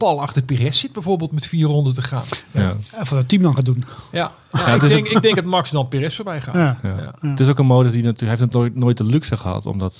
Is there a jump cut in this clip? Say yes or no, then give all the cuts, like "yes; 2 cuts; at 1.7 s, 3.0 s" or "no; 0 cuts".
no; 0 cuts